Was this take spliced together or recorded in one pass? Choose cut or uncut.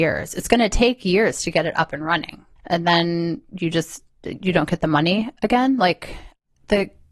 cut